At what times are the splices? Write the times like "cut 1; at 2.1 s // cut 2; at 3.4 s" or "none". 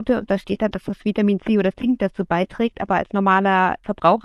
none